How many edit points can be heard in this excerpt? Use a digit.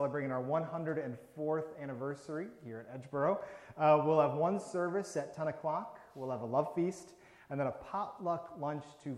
0